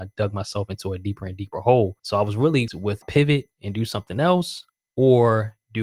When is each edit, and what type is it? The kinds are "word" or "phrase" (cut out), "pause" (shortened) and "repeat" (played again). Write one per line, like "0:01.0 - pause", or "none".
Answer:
0:02.0 - pause
0:02.7 - word
0:03.0 - phrase